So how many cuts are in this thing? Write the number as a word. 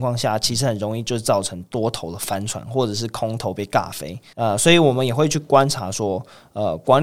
one